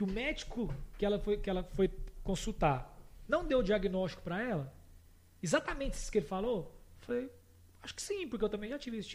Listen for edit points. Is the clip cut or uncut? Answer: uncut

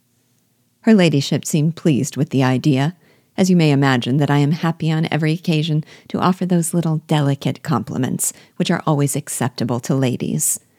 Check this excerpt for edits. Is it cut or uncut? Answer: uncut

